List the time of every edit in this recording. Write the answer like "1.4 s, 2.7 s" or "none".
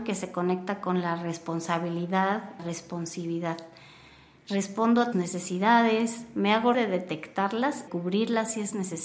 2.6 s, 5.1 s, 6.7 s, 7.9 s